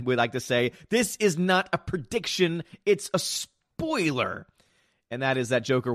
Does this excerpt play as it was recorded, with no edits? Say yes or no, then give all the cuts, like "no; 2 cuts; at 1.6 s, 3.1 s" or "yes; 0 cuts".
yes; 0 cuts